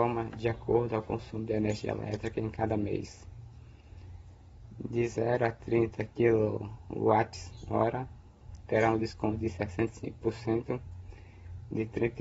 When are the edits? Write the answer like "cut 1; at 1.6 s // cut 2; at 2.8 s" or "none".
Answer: none